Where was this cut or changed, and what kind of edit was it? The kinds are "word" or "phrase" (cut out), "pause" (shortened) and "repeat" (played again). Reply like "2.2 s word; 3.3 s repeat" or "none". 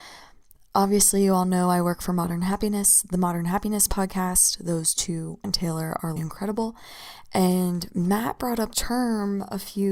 5.4 s word; 6.2 s word; 8.7 s word